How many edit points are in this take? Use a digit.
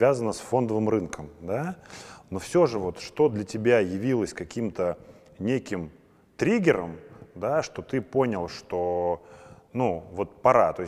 0